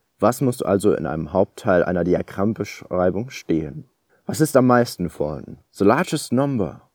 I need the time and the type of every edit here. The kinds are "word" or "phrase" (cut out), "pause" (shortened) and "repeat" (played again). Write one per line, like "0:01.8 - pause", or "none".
0:04.1 - pause
0:05.7 - pause